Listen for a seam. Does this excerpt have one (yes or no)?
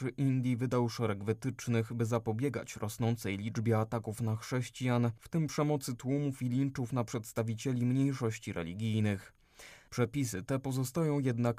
no